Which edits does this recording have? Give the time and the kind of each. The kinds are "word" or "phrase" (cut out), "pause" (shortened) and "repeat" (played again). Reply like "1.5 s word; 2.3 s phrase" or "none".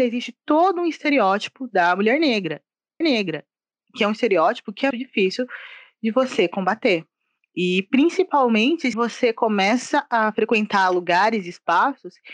3.0 s repeat; 4.9 s word; 8.9 s word